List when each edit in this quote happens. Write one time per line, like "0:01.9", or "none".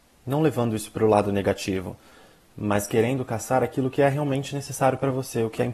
none